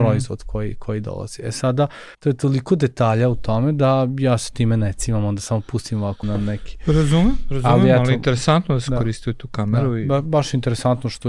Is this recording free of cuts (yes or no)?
no